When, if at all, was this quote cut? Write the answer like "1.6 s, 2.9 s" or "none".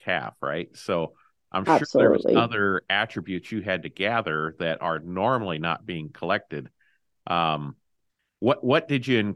none